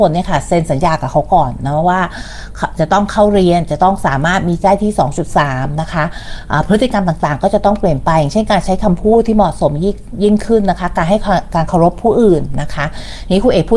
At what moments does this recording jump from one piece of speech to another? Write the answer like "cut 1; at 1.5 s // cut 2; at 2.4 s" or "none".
cut 1; at 4.6 s